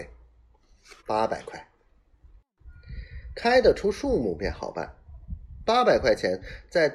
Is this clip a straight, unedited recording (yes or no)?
no